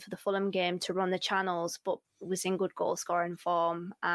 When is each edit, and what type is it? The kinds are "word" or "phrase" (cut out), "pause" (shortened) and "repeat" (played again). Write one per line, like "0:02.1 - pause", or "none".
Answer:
0:02.0 - word